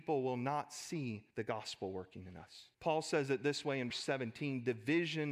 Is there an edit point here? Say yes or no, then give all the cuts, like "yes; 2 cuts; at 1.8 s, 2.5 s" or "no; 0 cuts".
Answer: yes; 3 cuts; at 1.3 s, 2.7 s, 3.9 s